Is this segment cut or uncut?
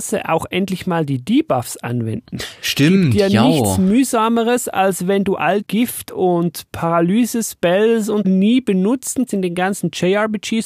cut